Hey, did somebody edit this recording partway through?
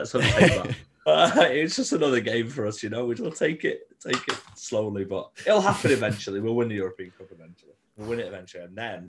yes; 5 cuts; at 1.1 s, 3.2 s, 4.5 s, 5.3 s, 7.8 s

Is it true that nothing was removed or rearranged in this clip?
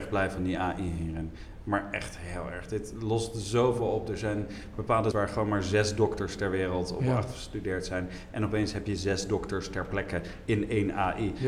no; 1 cut; at 5.1 s

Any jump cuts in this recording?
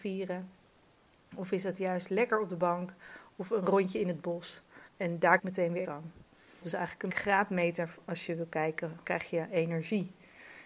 yes; 6 cuts; at 4.9 s, 5.4 s, 5.8 s, 6.6 s, 7.1 s, 9.0 s

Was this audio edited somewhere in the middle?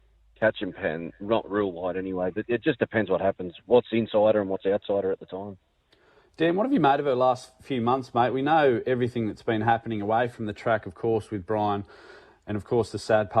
no; 0 cuts

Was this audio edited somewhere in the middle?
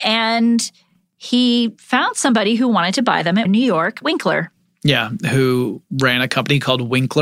yes; 2 cuts; at 3.5 s, 4.0 s

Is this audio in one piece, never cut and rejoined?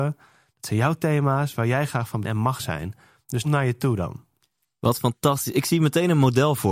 no; 2 cuts; at 2.2 s, 3.4 s

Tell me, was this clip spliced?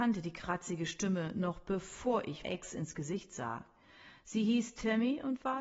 yes; 1 cut; at 2.4 s

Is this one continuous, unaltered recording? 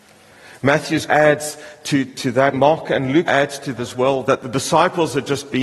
no; 6 cuts; at 1.1 s, 2.0 s, 2.5 s, 3.3 s, 3.8 s, 4.2 s

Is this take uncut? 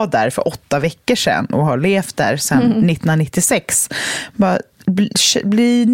yes; 0 cuts

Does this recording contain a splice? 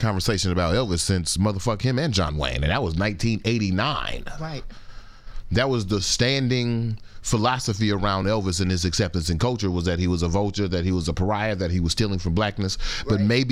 no; 0 cuts

